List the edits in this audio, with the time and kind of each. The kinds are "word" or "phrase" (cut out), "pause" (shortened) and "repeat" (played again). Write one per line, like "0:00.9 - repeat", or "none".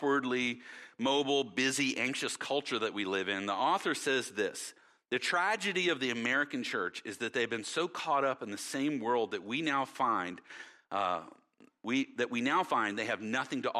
none